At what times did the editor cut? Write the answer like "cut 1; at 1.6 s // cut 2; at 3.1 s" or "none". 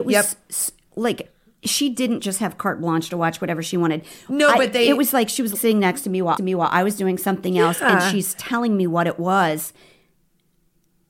cut 1; at 5.5 s // cut 2; at 6.4 s

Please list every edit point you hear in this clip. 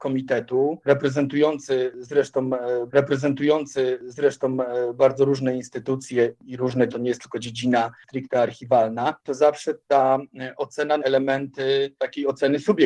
cut 1; at 2.9 s // cut 2; at 6.9 s // cut 3; at 9.2 s // cut 4; at 11.0 s

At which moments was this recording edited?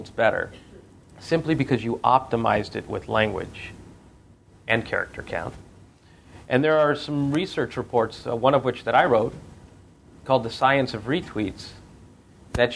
none

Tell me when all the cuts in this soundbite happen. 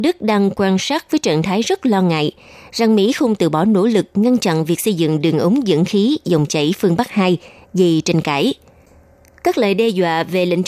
none

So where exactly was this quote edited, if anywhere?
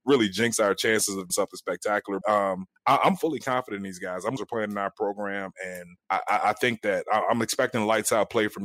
cut 1; at 1.3 s // cut 2; at 2.2 s // cut 3; at 2.8 s // cut 4; at 4.4 s // cut 5; at 6.0 s

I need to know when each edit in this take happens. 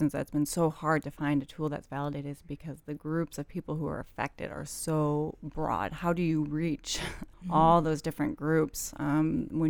cut 1; at 7.3 s

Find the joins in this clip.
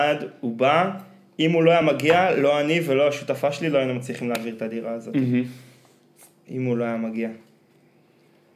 none

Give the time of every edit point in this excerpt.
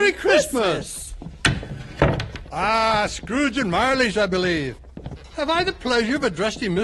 none

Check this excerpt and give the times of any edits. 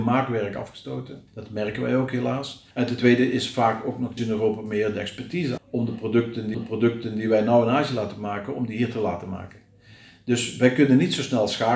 cut 1; at 1.3 s // cut 2; at 2.7 s // cut 3; at 4.2 s // cut 4; at 5.6 s // cut 5; at 6.5 s

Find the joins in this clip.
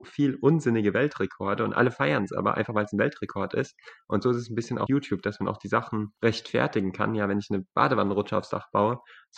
cut 1; at 4.9 s // cut 2; at 6.2 s

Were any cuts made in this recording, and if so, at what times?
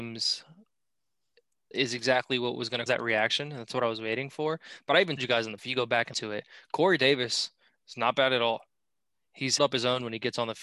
cut 1; at 1.7 s // cut 2; at 2.9 s // cut 3; at 5.2 s // cut 4; at 5.6 s // cut 5; at 6.1 s // cut 6; at 9.6 s

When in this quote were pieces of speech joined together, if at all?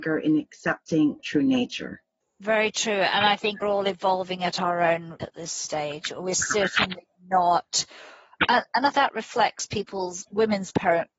cut 1; at 1.2 s // cut 2; at 2.2 s // cut 3; at 3.6 s // cut 4; at 5.2 s // cut 5; at 8.9 s

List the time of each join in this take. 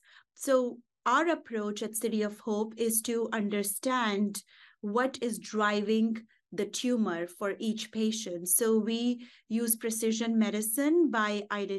none

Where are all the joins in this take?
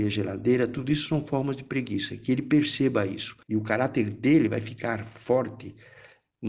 cut 1; at 3.4 s

